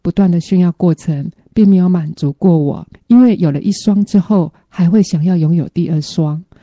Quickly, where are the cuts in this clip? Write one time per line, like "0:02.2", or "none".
0:02.9